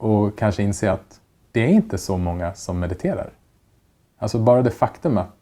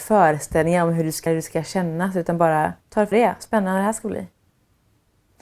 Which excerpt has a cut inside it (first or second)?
second